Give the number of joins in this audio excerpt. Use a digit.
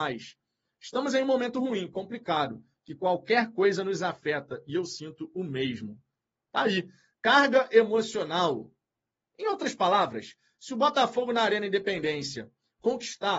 0